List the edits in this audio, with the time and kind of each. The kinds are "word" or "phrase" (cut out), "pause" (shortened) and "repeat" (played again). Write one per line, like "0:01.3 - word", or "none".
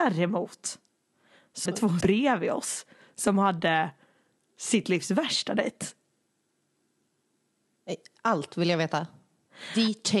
0:01.7 - word
0:02.0 - word